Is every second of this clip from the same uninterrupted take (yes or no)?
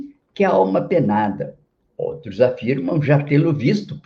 yes